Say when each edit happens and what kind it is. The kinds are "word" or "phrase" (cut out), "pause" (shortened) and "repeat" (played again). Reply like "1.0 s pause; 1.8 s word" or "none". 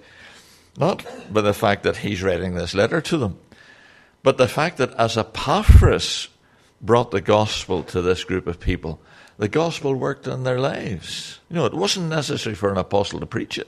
11.4 s pause